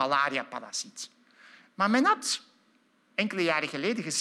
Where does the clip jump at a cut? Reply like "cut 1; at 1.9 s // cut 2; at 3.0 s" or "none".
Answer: none